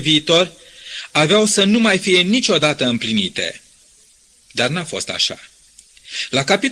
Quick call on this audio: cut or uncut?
uncut